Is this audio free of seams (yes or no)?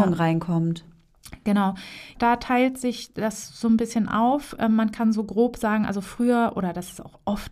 yes